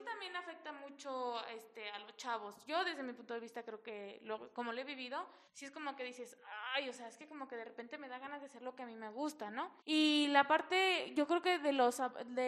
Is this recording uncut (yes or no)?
no